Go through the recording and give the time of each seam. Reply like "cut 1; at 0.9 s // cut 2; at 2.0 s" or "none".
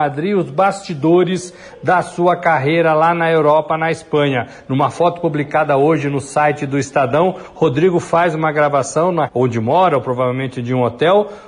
cut 1; at 9.3 s